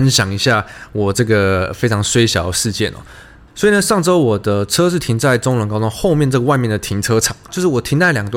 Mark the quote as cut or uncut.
uncut